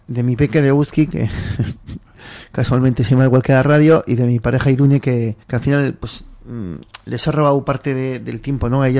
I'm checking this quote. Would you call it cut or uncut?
cut